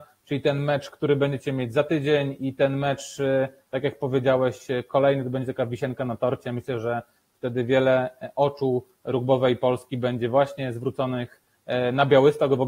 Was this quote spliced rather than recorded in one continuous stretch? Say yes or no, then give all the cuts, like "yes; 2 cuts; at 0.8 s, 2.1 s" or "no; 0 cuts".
no; 0 cuts